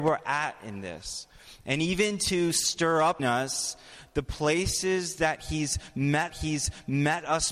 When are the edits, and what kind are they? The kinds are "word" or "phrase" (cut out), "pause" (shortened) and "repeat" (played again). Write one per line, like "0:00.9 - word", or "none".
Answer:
0:03.2 - word
0:06.3 - repeat